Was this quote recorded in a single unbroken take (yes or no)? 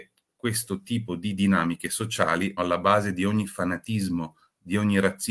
no